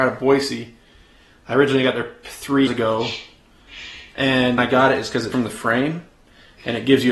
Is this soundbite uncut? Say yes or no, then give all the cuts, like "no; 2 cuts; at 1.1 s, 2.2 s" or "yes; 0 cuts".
no; 4 cuts; at 2.2 s, 2.7 s, 4.6 s, 5.3 s